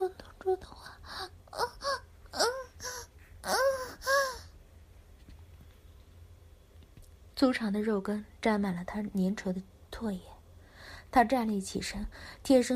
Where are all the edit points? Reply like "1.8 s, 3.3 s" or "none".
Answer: none